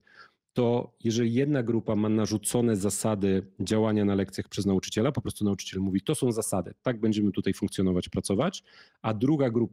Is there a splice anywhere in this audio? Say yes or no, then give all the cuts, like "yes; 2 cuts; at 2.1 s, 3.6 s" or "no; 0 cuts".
no; 0 cuts